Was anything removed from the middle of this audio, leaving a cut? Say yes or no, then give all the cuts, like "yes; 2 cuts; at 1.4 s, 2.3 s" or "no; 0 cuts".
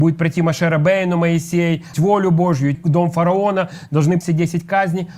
yes; 3 cuts; at 1.9 s, 2.7 s, 4.2 s